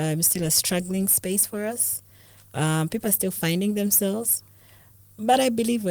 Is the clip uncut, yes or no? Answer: yes